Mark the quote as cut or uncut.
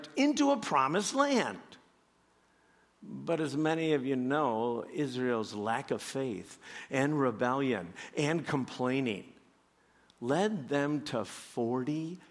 uncut